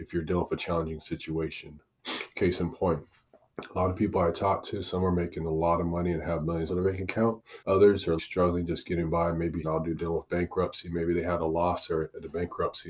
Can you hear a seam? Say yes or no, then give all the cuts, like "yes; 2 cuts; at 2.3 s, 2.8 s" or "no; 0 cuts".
yes; 6 cuts; at 3.3 s, 6.7 s, 7.6 s, 8.2 s, 9.6 s, 10.0 s